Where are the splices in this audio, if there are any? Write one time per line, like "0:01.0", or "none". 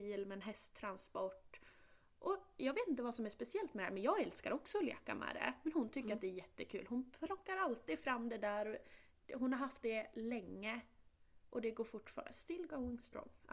none